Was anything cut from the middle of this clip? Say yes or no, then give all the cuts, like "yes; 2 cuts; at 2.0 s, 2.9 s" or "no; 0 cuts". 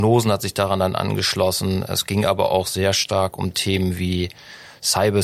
no; 0 cuts